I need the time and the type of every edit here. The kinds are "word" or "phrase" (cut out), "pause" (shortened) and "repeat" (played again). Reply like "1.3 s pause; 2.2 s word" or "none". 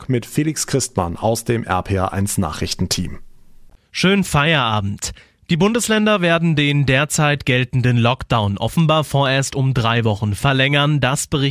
none

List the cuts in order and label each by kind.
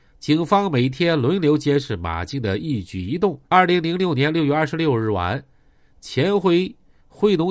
3.5 s pause

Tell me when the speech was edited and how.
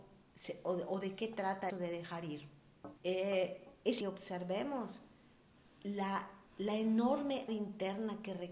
1.7 s word; 3.0 s pause; 4.0 s phrase; 6.5 s pause; 7.5 s word

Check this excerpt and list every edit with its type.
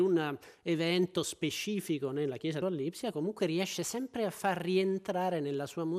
2.6 s phrase

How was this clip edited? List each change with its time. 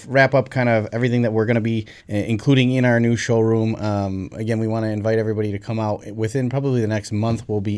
2.0 s pause

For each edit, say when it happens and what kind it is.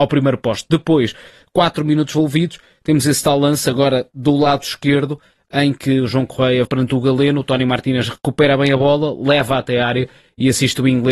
6.7 s word

